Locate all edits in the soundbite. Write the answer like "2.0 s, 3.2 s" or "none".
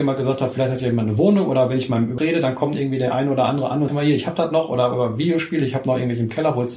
2.2 s, 3.9 s